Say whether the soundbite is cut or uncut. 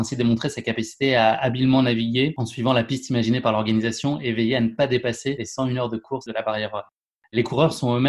uncut